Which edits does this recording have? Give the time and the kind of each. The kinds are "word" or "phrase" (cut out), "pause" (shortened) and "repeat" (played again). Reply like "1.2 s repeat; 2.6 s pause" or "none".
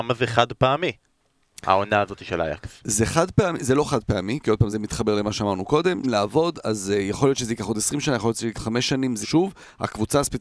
4.7 s word; 6.0 s word; 8.5 s word; 9.2 s word